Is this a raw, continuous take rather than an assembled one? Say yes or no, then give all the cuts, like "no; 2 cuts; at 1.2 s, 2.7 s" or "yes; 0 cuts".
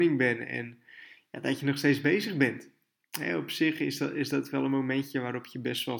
yes; 0 cuts